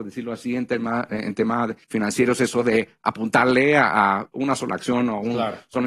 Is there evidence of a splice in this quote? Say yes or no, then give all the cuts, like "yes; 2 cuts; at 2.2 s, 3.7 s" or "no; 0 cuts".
yes; 1 cut; at 1.8 s